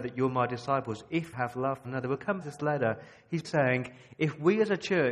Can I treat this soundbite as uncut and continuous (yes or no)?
no